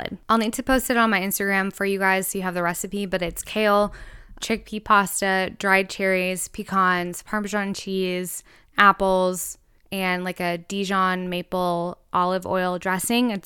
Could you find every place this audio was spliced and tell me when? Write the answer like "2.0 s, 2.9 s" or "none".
4.4 s